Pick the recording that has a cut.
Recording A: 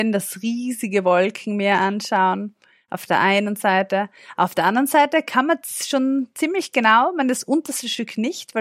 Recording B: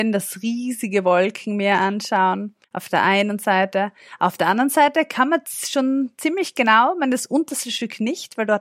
B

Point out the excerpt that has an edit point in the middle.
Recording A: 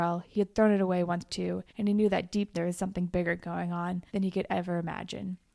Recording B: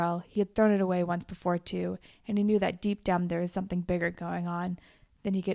A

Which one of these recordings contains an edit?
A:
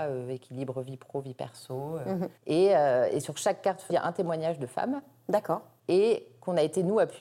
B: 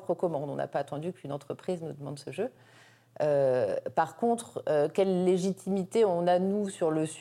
A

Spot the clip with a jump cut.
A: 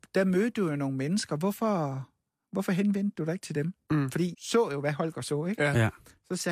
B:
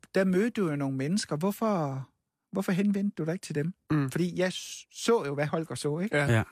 A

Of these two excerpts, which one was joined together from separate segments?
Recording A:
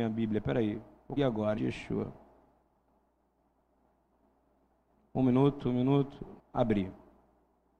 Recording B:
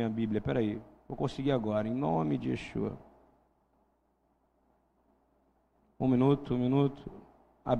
A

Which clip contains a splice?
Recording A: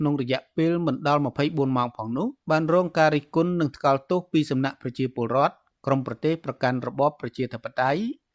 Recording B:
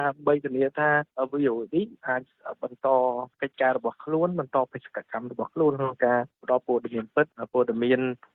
A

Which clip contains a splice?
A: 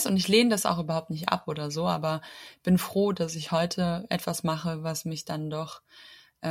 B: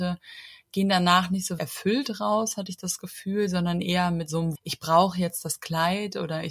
B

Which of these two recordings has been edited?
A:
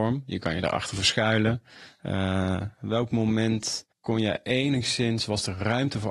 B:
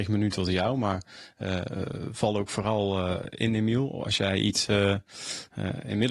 A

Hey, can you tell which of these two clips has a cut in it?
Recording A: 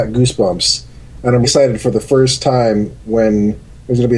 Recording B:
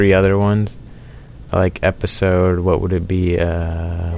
A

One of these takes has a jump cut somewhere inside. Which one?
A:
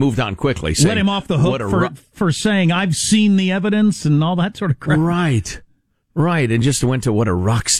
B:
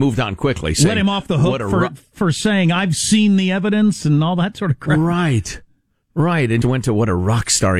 B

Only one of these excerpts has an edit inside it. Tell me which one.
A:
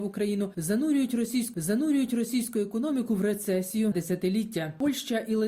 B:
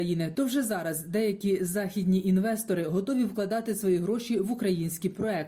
A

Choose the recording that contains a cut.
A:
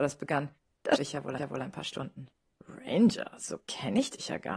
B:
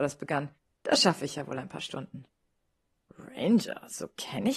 A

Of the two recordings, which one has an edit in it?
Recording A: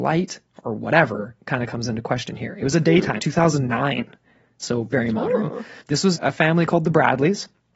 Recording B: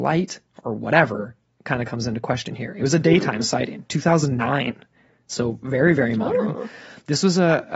A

